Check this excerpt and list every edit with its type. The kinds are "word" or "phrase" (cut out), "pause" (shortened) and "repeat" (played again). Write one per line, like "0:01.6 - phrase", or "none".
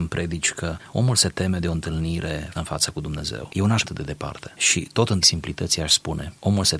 0:02.5 - word
0:03.8 - word
0:05.2 - word